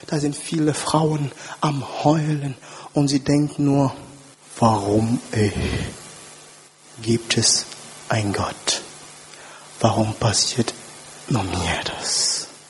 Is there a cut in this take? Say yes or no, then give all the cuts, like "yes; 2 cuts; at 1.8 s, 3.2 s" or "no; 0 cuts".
yes; 2 cuts; at 4.3 s, 6.7 s